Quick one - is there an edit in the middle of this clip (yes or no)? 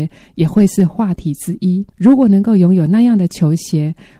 yes